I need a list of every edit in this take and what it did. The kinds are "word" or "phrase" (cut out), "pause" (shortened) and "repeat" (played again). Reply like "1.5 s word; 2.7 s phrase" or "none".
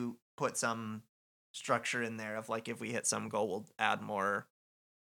none

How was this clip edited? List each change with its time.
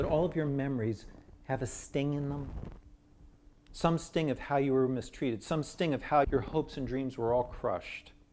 6.2 s word

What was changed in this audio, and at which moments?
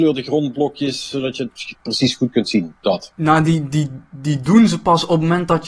none

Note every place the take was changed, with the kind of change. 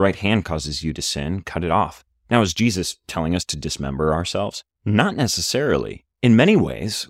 4.7 s pause; 6.1 s pause

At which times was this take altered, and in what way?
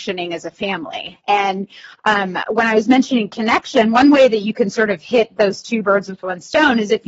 none

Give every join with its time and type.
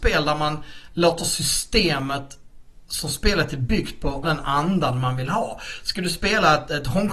4.2 s word

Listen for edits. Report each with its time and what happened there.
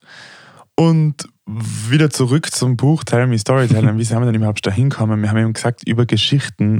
none

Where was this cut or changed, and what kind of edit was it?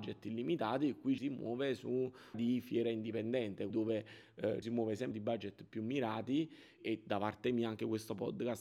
1.2 s word; 2.3 s word; 3.7 s word; 4.6 s word; 5.1 s word; 6.8 s word

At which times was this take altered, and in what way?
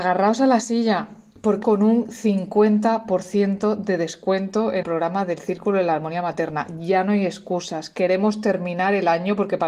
1.6 s word; 4.8 s word

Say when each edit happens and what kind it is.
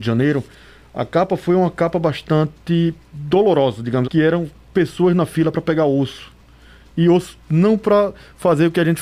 3.0 s pause; 4.0 s word

